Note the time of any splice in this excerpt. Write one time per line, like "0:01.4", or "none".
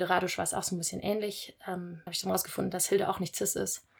0:02.1